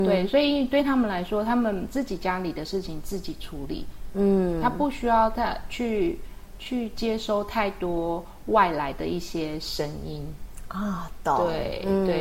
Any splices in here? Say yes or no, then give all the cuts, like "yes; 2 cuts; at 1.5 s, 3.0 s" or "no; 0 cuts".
no; 0 cuts